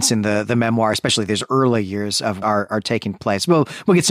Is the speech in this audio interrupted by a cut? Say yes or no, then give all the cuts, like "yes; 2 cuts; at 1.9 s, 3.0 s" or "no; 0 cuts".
yes; 1 cut; at 2.4 s